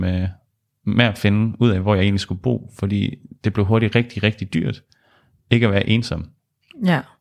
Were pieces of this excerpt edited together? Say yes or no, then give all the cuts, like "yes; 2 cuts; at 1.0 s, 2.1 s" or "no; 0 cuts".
no; 0 cuts